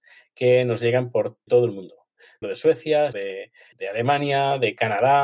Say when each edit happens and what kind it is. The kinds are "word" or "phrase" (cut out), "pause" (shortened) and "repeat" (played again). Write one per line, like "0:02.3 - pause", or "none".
0:01.5 - word
0:02.4 - word
0:03.1 - word
0:03.7 - word

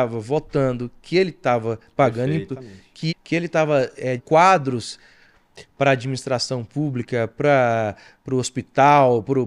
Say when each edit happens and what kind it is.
0:02.5 - word
0:03.1 - word
0:04.2 - word

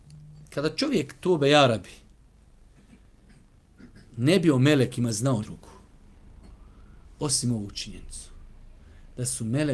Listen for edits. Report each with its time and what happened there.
0:05.4 - word

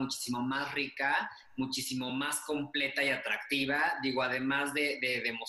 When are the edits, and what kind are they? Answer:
none

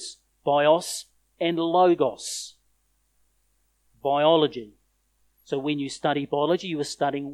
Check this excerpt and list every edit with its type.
none

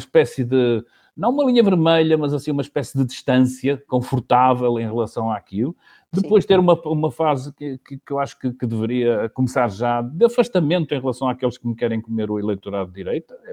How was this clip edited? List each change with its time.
none

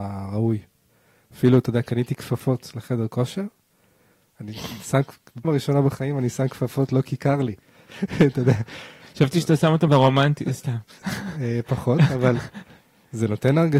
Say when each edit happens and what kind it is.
0:05.4 - word
0:09.9 - word

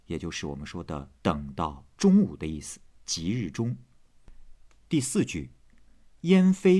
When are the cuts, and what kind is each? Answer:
0:01.2 - pause

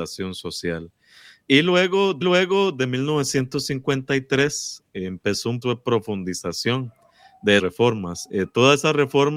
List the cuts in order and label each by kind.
0:02.2 - repeat
0:05.6 - word
0:07.6 - word

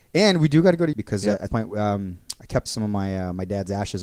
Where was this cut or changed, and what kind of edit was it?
0:00.9 - word
0:01.5 - word
0:02.7 - word

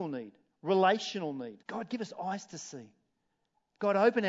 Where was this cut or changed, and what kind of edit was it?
0:01.6 - pause

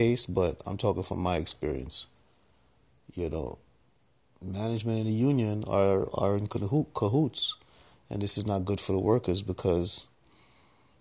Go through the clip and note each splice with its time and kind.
none

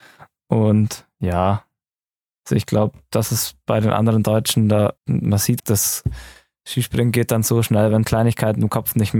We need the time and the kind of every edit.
0:05.0 - pause
0:05.6 - word
0:08.0 - phrase

